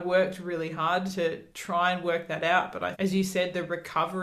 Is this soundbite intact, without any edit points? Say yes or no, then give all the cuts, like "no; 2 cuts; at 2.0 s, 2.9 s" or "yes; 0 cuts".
no; 2 cuts; at 1.5 s, 2.9 s